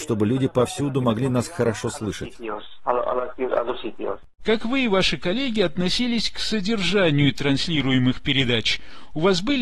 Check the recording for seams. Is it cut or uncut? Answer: uncut